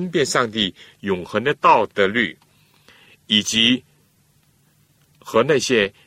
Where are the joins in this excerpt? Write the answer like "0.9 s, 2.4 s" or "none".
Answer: none